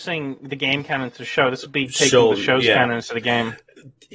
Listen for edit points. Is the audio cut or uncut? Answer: uncut